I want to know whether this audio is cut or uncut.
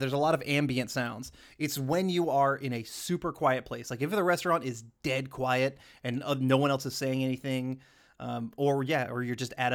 uncut